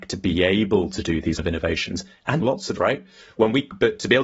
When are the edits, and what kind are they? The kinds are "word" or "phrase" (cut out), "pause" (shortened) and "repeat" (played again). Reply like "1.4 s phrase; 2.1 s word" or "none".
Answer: 1.4 s word; 2.4 s word; 2.8 s word